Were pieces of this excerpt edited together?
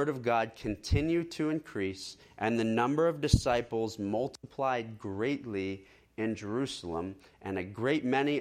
no; 0 cuts

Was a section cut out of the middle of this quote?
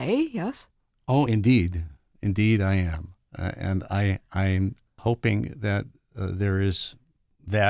no; 0 cuts

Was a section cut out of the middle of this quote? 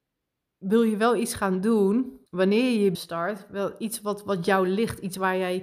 yes; 2 cuts; at 2.3 s, 2.9 s

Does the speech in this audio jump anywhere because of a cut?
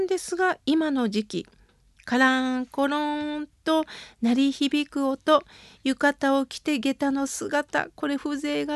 no; 0 cuts

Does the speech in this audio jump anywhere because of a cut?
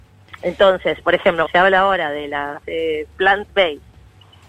yes; 2 cuts; at 1.4 s, 2.6 s

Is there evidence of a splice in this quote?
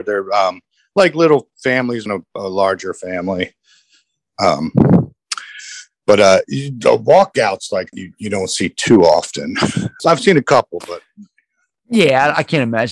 yes; 3 cuts; at 2.1 s, 7.9 s, 10.0 s

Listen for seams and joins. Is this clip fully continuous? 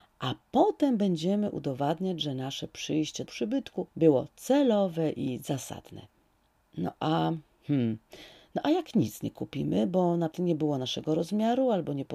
no; 3 cuts; at 3.3 s, 3.9 s, 10.3 s

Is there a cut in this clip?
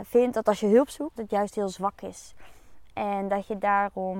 yes; 1 cut; at 1.2 s

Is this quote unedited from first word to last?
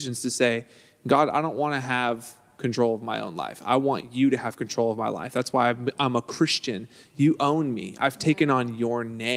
yes; 0 cuts

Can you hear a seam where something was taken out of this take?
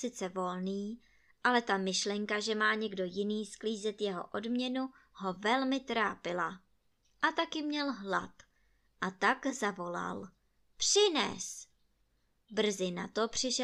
no; 0 cuts

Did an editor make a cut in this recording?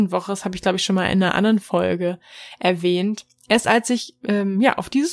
no; 0 cuts

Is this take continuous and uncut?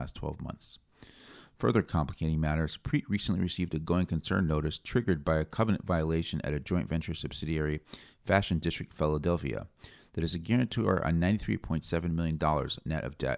yes; 0 cuts

